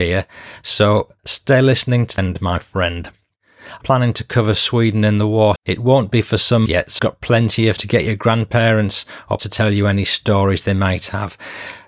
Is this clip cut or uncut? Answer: cut